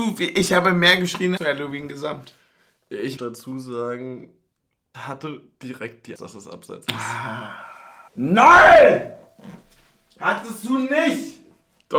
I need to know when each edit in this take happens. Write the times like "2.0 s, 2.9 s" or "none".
1.4 s, 3.2 s, 4.9 s, 6.2 s, 8.1 s